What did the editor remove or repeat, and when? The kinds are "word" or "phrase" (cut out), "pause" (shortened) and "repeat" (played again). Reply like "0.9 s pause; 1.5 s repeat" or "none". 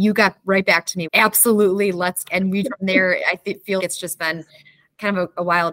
1.0 s word; 2.2 s word; 2.6 s word; 3.8 s word